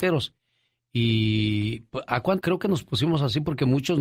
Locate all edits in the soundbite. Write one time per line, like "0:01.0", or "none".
0:02.4